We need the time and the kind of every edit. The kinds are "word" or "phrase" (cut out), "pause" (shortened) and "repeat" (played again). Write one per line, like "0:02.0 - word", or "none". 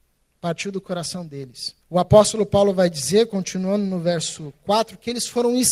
0:01.8 - pause